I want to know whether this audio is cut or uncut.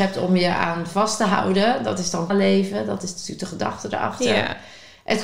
cut